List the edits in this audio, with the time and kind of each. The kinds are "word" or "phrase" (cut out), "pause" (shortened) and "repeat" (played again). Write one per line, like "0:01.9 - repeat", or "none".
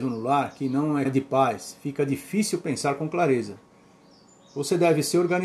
0:01.0 - phrase